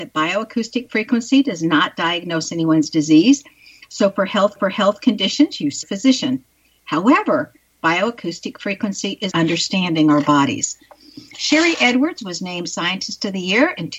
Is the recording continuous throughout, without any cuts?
no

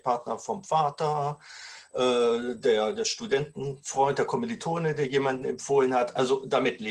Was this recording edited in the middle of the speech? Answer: no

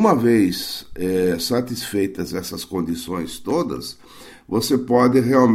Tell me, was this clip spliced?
no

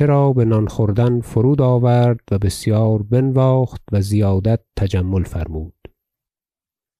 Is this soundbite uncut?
yes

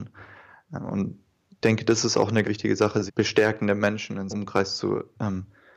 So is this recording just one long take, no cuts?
no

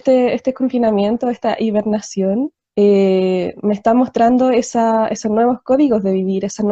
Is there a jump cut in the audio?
yes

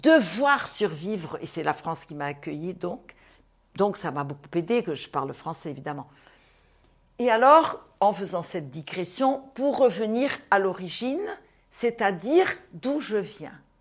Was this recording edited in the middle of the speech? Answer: no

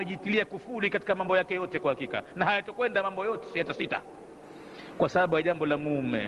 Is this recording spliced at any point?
no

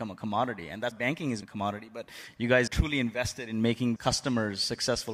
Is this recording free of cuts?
no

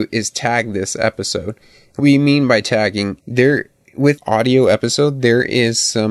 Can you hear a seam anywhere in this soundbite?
yes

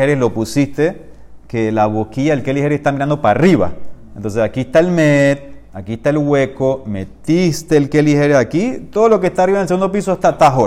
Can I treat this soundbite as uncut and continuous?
yes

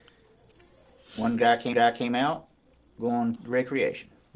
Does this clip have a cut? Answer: yes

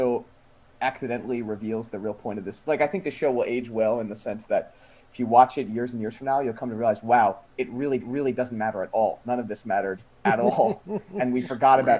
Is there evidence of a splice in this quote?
yes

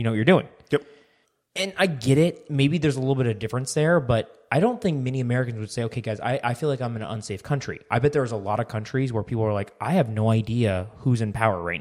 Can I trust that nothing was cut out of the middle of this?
no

